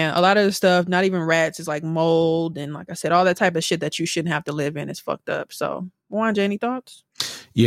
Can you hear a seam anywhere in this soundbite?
no; 0 cuts

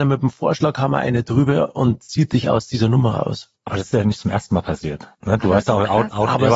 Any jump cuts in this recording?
yes; 2 cuts; at 3.6 s, 5.1 s

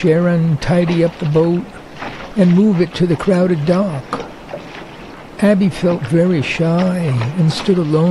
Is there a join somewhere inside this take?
no; 0 cuts

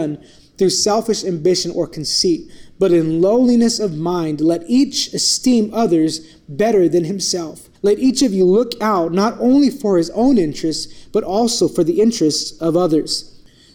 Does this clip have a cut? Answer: yes; 1 cut; at 7.7 s

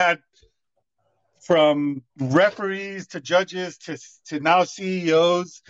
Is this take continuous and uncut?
no; 1 cut; at 2.1 s

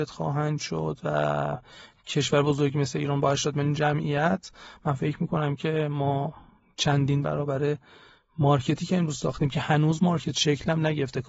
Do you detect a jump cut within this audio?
no; 0 cuts

